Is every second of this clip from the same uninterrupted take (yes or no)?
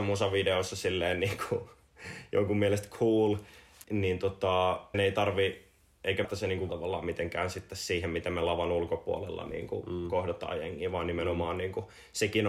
no